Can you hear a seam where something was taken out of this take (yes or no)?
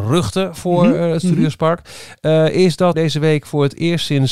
yes